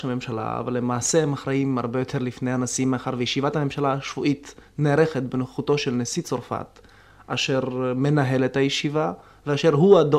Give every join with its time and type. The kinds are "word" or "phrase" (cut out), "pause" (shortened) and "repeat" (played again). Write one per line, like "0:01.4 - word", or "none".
none